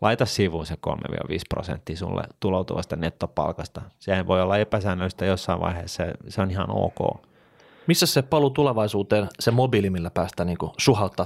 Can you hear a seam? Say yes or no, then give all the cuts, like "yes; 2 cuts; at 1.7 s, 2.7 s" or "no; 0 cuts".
no; 0 cuts